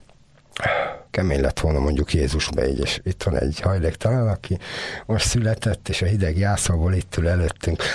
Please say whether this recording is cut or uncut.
cut